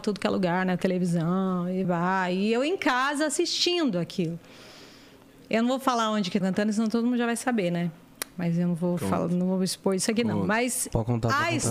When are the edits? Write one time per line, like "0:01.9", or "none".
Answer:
0:01.8
0:06.4